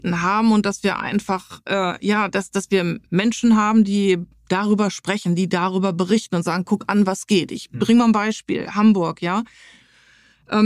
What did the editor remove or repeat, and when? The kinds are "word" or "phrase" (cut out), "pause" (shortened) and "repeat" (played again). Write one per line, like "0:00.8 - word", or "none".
0:03.1 - pause

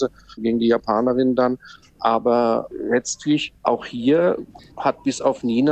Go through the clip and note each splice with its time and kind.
0:03.6 - pause

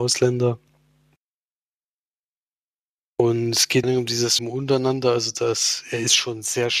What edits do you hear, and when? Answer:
0:03.8 - phrase
0:04.4 - word

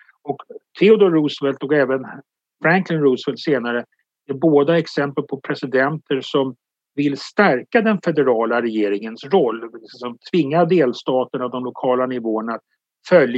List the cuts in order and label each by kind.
none

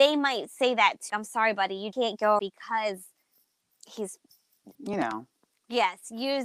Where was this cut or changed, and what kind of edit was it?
0:01.1 - word
0:01.9 - word
0:02.4 - word
0:04.7 - word

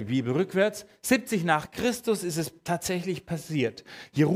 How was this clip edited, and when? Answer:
none

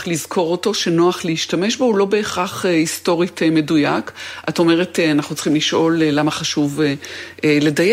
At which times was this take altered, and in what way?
none

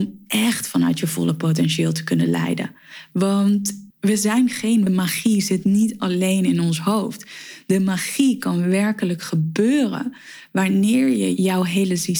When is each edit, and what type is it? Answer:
0:03.9 - pause
0:04.9 - phrase

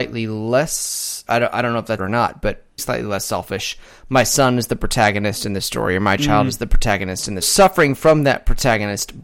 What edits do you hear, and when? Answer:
0:01.3 - word
0:02.0 - word
0:02.8 - word
0:07.4 - phrase

